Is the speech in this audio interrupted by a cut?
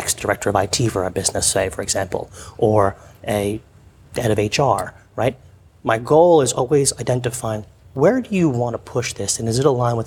no; 0 cuts

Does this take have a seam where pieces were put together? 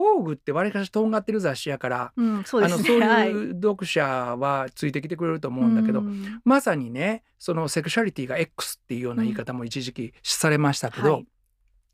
yes; 1 cut; at 10.2 s

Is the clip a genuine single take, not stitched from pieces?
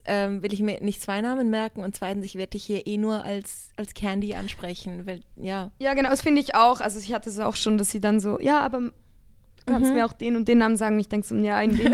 yes; 0 cuts

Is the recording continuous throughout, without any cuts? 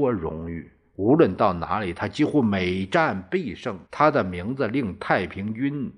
no; 1 cut; at 3.9 s

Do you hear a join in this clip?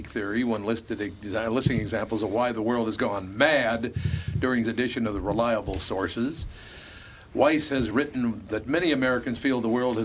yes; 2 cuts; at 4.6 s, 7.9 s

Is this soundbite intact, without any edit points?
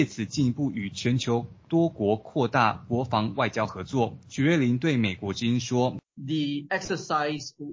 no; 2 cuts; at 4.2 s, 6.1 s

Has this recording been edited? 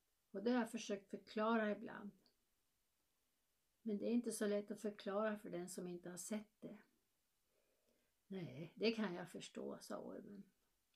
no; 0 cuts

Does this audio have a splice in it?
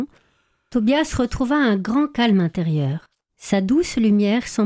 yes; 1 cut; at 3.3 s

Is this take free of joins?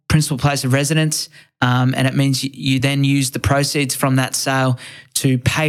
yes; 0 cuts

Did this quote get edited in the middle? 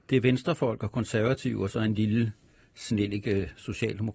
no; 0 cuts

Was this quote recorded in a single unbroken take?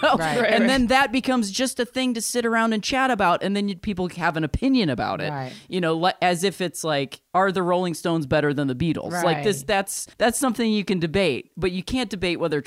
no; 2 cuts; at 7.3 s, 10.1 s

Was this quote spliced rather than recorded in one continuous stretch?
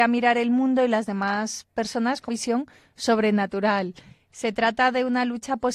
yes; 1 cut; at 2.3 s

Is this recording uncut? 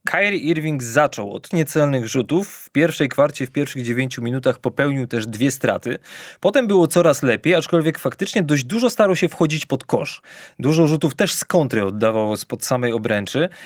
no; 1 cut; at 1.5 s

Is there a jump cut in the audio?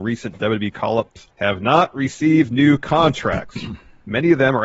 yes; 1 cut; at 1.3 s

